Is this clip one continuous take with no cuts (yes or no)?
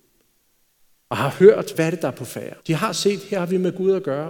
no